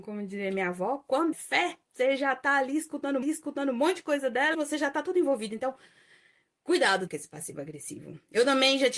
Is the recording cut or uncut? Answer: cut